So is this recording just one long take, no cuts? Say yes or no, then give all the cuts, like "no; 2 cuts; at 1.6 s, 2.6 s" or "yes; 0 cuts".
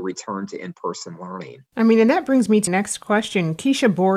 no; 1 cut; at 2.7 s